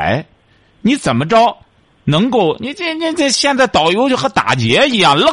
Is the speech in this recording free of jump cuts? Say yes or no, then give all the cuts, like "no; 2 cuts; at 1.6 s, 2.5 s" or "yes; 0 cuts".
yes; 0 cuts